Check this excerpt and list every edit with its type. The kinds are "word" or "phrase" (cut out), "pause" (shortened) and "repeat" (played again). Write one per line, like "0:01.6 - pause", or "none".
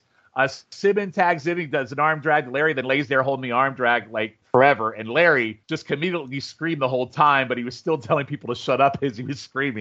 0:04.4 - pause
0:05.6 - pause